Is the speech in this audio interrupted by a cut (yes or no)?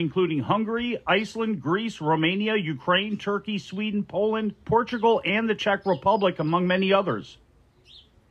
no